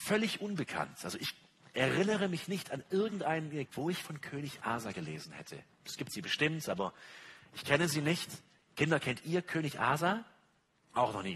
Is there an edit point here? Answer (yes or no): yes